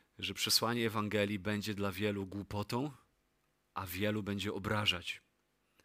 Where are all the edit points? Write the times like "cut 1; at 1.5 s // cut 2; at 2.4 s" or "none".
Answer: none